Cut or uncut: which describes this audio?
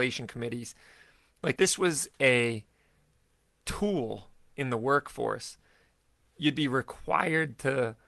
cut